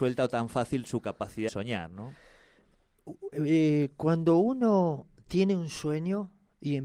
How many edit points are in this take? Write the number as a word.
one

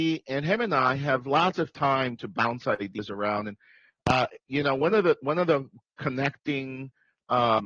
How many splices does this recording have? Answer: zero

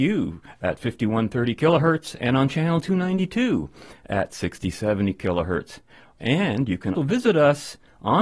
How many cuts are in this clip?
one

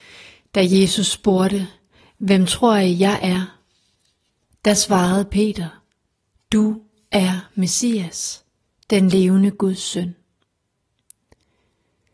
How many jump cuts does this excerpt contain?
zero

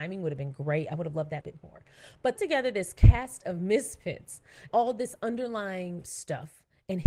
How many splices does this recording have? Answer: four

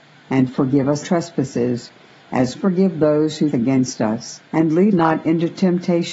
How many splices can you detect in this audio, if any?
five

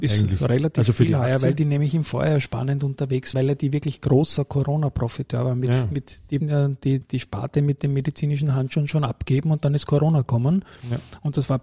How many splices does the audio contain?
four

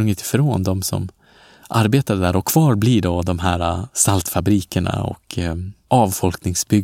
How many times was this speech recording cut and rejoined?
zero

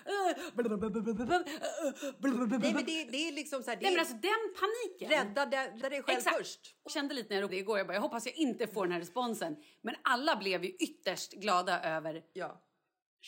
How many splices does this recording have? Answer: three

